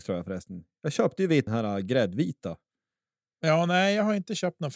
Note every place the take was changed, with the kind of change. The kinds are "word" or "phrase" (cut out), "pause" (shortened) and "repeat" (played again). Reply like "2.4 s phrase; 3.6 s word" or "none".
1.5 s phrase